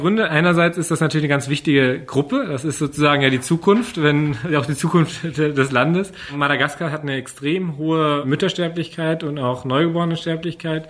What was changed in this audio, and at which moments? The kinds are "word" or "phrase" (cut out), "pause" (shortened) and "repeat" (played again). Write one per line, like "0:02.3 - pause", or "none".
none